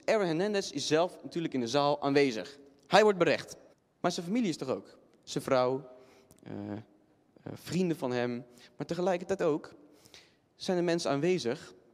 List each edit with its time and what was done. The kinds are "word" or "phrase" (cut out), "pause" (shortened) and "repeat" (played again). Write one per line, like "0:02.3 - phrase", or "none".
0:03.7 - pause